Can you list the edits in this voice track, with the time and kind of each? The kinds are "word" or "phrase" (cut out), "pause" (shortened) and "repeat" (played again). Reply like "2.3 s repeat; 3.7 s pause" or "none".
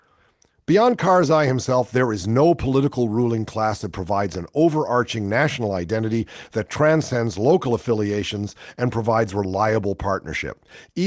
none